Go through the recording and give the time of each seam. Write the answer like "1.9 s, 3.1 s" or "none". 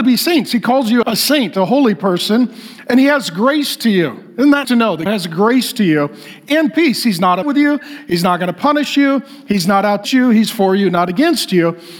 1.0 s, 4.6 s, 5.1 s, 7.4 s, 10.0 s